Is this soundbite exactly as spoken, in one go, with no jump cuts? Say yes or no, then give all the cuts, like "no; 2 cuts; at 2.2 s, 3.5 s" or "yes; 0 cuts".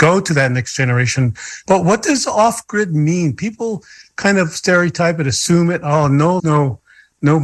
no; 1 cut; at 6.4 s